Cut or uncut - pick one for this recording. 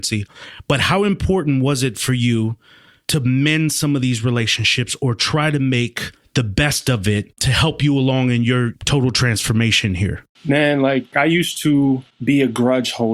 uncut